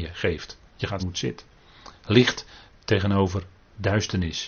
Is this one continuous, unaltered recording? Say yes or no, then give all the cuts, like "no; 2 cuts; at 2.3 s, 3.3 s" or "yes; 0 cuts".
no; 1 cut; at 1.0 s